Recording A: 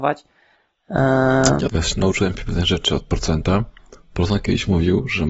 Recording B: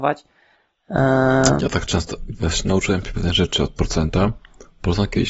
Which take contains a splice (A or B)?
A